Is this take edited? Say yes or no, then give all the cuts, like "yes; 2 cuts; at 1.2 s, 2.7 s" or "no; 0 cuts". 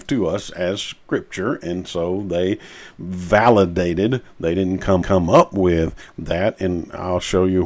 yes; 1 cut; at 5.0 s